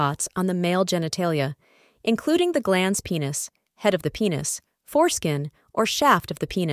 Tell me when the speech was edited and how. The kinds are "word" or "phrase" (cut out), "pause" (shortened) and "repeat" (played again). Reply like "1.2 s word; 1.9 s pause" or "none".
none